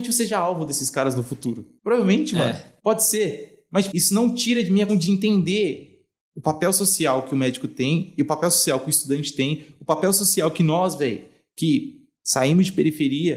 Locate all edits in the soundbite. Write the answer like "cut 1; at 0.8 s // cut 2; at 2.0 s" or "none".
cut 1; at 3.9 s // cut 2; at 4.9 s